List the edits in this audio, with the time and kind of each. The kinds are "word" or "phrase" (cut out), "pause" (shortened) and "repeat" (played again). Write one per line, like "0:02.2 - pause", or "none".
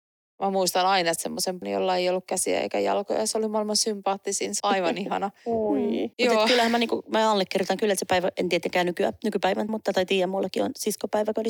0:01.2 - word
0:01.6 - word
0:04.6 - word
0:06.1 - pause
0:09.7 - word